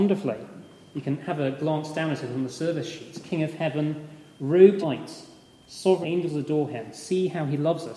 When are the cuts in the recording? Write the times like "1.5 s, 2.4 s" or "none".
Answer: 4.8 s, 6.0 s